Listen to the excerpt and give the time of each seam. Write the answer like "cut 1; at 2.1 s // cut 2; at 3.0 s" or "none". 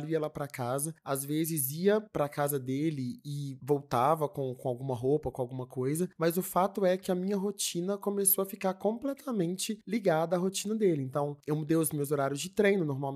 none